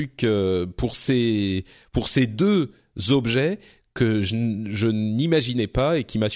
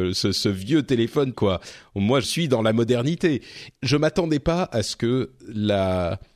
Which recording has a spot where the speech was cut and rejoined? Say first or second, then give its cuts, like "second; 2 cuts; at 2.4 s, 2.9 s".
second; 3 cuts; at 1.3 s, 2.2 s, 3.8 s